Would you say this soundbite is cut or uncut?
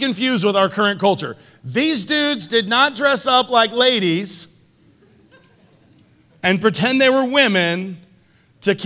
uncut